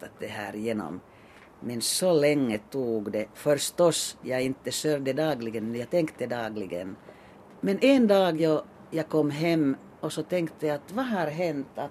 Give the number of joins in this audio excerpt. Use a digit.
0